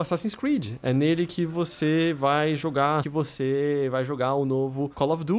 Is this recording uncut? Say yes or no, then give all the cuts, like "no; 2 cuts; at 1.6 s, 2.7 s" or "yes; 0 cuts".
no; 1 cut; at 3.0 s